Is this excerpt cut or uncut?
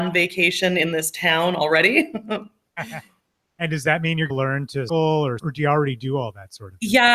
cut